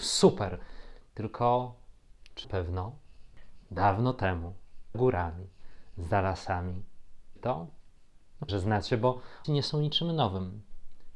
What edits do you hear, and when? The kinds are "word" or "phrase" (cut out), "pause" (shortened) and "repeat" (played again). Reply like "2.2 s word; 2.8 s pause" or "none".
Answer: 2.4 s word; 3.7 s word; 4.9 s word; 7.4 s word; 8.5 s word; 9.4 s word